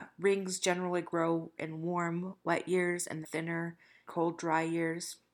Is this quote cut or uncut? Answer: cut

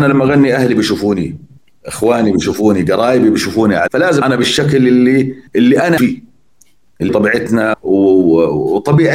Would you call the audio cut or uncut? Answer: cut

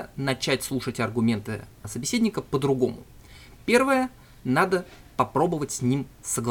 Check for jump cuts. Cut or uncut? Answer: uncut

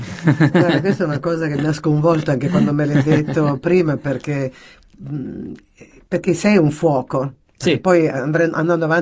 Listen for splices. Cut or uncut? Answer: uncut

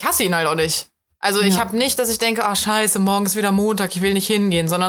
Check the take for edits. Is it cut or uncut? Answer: uncut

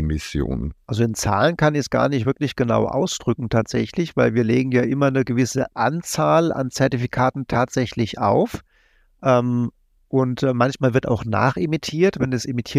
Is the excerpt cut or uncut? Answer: uncut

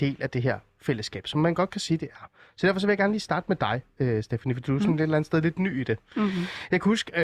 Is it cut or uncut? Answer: uncut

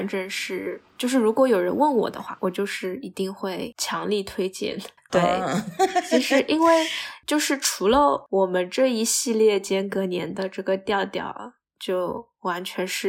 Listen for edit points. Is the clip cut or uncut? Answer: uncut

